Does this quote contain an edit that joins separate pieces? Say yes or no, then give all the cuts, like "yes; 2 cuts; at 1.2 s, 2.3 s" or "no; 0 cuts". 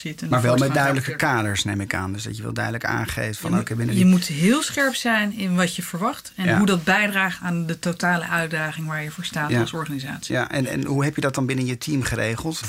no; 0 cuts